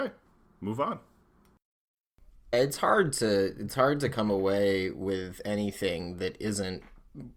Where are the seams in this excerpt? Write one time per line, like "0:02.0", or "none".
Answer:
0:02.5